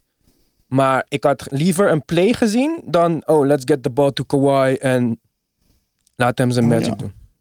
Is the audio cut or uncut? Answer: uncut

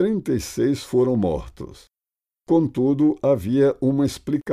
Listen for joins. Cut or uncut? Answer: uncut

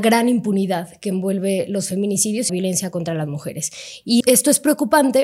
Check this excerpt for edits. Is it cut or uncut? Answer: cut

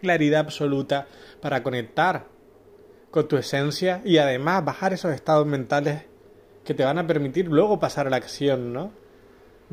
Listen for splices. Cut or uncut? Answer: uncut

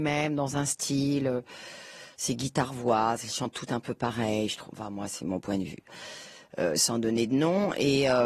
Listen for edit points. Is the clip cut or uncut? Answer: uncut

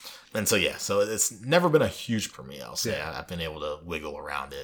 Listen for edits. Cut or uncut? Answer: cut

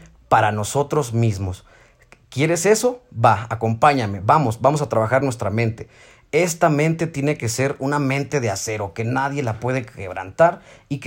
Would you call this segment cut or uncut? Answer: uncut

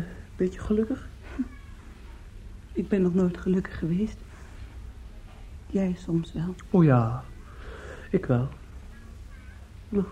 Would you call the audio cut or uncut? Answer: uncut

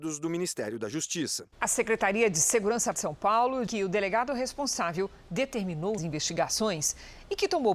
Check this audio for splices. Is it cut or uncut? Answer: cut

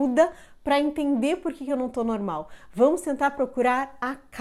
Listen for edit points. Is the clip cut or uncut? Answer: uncut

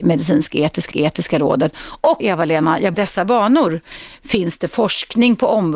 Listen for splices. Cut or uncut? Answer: cut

